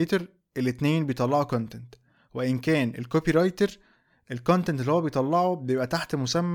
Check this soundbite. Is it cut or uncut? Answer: uncut